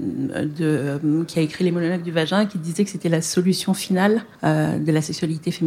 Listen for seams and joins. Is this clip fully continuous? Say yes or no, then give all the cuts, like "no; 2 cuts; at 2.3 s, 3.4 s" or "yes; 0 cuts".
no; 1 cut; at 4.3 s